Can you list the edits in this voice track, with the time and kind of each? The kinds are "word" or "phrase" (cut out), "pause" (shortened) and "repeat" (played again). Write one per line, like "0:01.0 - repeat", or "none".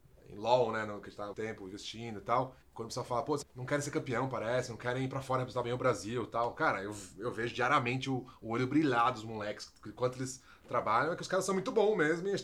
0:01.3 - word
0:02.6 - pause
0:03.4 - word